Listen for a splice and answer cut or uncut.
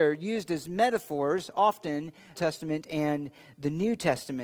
cut